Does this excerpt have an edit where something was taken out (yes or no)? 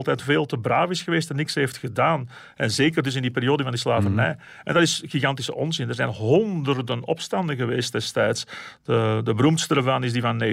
no